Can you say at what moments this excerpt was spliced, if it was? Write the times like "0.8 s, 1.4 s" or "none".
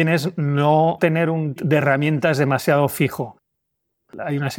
1.0 s, 1.6 s